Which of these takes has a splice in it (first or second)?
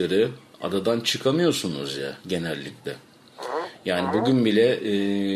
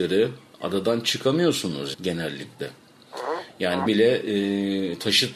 second